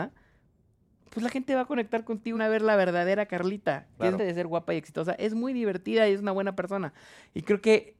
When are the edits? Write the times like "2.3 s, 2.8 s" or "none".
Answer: 2.3 s, 4.2 s